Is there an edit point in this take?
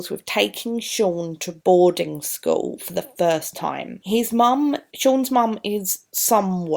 no; 0 cuts

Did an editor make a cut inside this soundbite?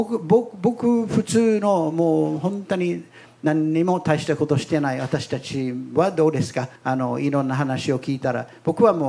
yes; 1 cut; at 6.8 s

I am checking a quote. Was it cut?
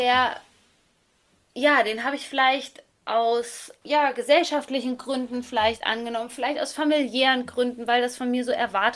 yes; 1 cut; at 3.8 s

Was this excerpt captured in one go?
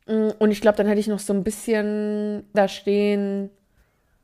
no; 1 cut; at 2.5 s

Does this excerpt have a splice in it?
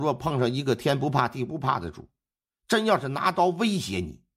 no; 0 cuts

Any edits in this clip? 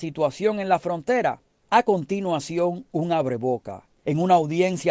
no; 0 cuts

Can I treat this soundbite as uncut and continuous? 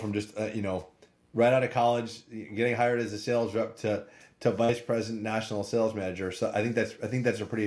yes; 0 cuts

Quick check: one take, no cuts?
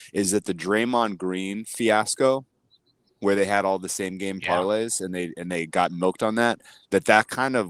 yes; 0 cuts

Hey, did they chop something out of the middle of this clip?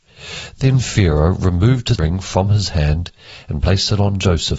yes; 1 cut; at 2.0 s

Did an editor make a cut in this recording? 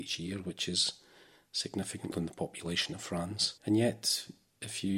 yes; 2 cuts; at 2.1 s, 3.6 s

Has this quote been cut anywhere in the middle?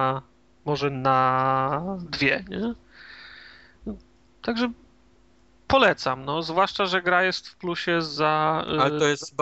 no; 0 cuts

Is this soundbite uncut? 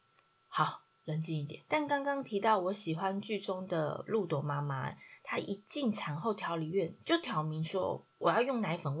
no; 1 cut; at 1.7 s

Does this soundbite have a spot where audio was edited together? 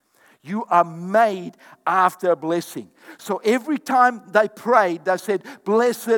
no; 0 cuts

